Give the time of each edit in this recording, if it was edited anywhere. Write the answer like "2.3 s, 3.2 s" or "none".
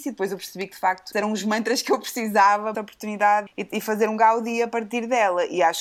1.1 s, 2.7 s, 3.5 s

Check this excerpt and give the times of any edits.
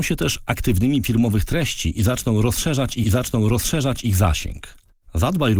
1.0 s, 3.0 s

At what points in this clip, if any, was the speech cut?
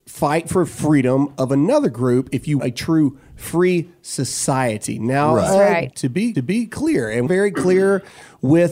2.6 s, 5.9 s, 6.3 s, 7.3 s

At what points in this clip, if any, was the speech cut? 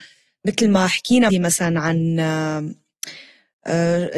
1.3 s

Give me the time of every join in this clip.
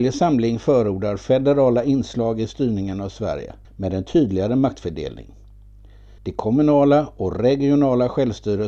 3.6 s, 6.2 s

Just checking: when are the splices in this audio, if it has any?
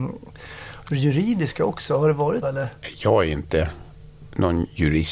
2.4 s

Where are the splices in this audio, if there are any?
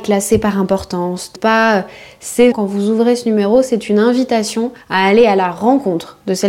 1.4 s, 2.5 s, 4.8 s

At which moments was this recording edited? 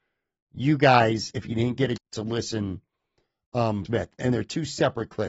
1.3 s, 2.0 s, 3.8 s, 4.2 s

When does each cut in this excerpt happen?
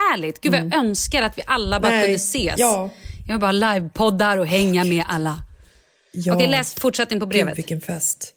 none

